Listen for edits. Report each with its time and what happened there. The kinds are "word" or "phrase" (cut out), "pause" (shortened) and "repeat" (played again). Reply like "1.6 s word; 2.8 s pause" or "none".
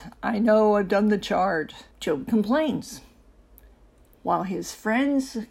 1.9 s pause